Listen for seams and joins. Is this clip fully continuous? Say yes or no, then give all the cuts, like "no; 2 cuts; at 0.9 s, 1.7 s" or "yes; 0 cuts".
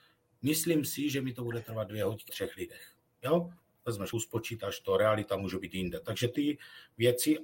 no; 3 cuts; at 2.3 s, 4.1 s, 6.3 s